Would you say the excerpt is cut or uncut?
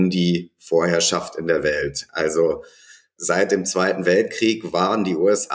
uncut